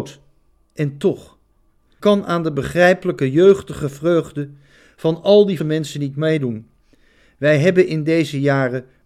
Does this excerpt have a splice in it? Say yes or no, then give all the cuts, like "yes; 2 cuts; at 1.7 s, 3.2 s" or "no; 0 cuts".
yes; 2 cuts; at 2.0 s, 5.6 s